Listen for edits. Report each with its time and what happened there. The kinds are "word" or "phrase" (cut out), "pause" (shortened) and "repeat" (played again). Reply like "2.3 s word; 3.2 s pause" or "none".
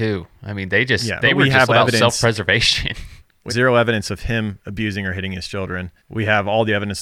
1.2 s word; 1.7 s word; 3.5 s word; 6.0 s pause